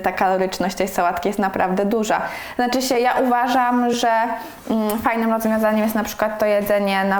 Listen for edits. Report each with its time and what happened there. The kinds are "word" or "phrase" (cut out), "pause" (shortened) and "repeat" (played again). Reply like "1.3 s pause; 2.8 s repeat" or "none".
none